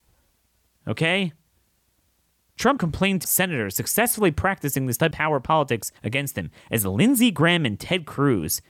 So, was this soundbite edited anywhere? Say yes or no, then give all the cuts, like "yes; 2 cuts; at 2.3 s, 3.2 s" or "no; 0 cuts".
yes; 4 cuts; at 2.8 s, 3.2 s, 5.1 s, 6.0 s